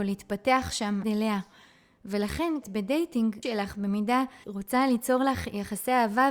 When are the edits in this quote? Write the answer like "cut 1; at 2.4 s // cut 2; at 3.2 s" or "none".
cut 1; at 1.0 s // cut 2; at 2.6 s // cut 3; at 3.4 s // cut 4; at 4.4 s

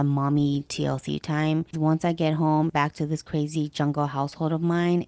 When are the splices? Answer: cut 1; at 1.7 s // cut 2; at 2.7 s

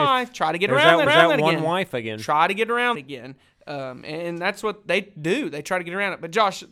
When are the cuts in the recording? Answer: cut 1; at 1.1 s // cut 2; at 2.9 s

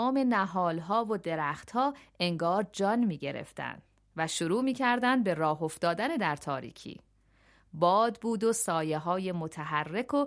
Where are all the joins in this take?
none

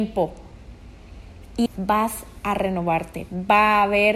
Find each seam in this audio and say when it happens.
cut 1; at 1.7 s

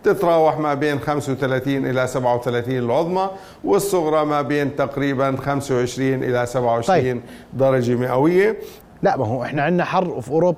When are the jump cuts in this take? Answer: none

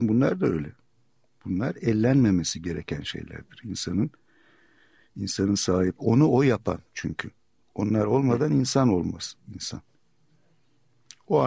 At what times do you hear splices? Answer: cut 1; at 6.0 s

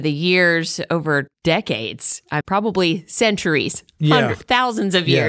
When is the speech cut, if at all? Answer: cut 1; at 1.3 s // cut 2; at 2.4 s

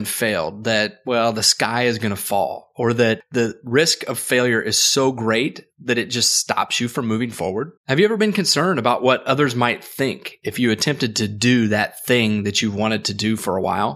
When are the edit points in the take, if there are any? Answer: cut 1; at 7.8 s

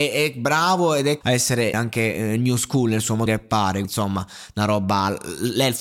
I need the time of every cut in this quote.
cut 1; at 1.2 s // cut 2; at 1.7 s // cut 3; at 3.3 s // cut 4; at 3.8 s

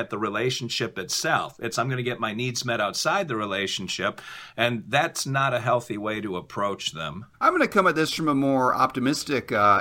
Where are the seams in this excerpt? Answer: cut 1; at 7.3 s

